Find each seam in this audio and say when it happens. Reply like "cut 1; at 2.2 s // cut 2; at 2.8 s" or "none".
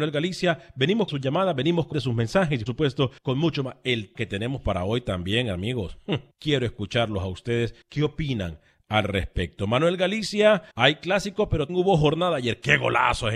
cut 1; at 1.1 s // cut 2; at 1.9 s // cut 3; at 2.7 s // cut 4; at 3.2 s // cut 5; at 4.1 s // cut 6; at 6.3 s // cut 7; at 7.8 s // cut 8; at 10.7 s // cut 9; at 11.7 s